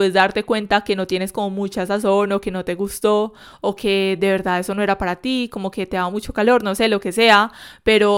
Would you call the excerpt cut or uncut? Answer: uncut